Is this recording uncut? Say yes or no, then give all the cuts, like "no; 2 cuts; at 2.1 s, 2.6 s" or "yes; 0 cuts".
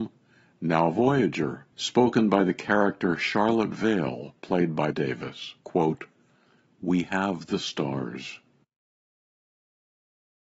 no; 3 cuts; at 1.7 s, 4.9 s, 5.6 s